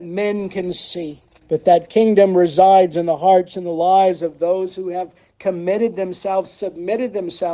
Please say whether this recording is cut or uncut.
cut